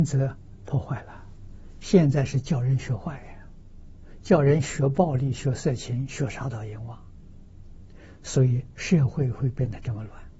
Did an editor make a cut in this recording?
no; 0 cuts

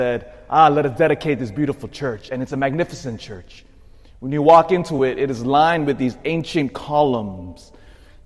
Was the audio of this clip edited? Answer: no; 0 cuts

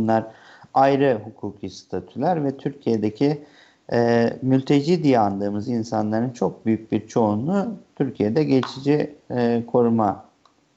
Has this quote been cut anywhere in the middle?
no; 0 cuts

